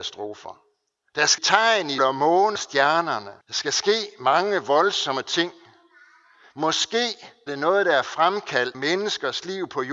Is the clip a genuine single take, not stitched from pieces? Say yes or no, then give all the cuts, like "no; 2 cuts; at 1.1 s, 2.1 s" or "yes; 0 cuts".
no; 6 cuts; at 1.4 s, 2.0 s, 2.6 s, 3.4 s, 7.5 s, 8.7 s